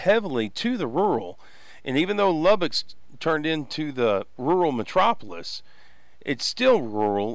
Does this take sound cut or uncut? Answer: uncut